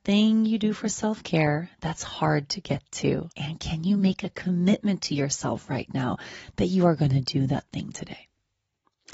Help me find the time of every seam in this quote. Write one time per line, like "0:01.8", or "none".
0:03.3